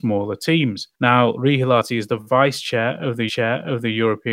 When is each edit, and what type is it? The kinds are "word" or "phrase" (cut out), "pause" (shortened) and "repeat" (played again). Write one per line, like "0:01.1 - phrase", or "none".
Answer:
0:00.9 - pause
0:03.3 - repeat